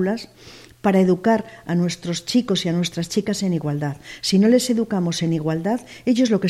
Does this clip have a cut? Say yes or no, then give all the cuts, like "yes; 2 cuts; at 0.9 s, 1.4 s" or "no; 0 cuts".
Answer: no; 0 cuts